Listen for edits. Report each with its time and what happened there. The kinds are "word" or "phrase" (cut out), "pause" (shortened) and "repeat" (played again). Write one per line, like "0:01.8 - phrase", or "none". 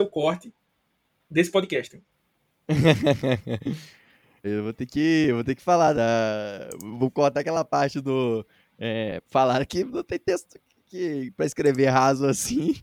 0:04.4 - word
0:05.9 - word